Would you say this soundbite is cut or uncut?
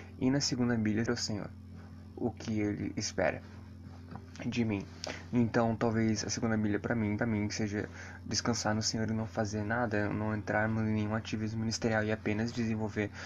cut